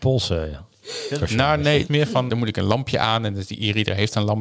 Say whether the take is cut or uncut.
cut